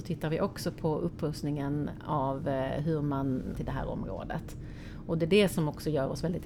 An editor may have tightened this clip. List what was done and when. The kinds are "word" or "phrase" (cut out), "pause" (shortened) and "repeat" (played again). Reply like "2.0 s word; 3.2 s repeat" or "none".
3.6 s phrase